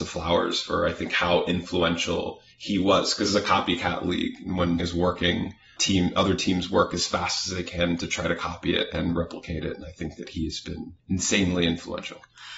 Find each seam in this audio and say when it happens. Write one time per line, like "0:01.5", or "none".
0:02.5
0:03.3
0:04.8
0:11.0